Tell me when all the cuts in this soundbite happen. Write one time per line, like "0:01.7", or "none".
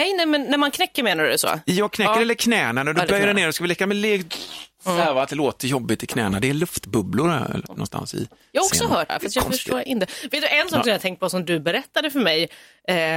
0:03.5
0:07.7
0:09.1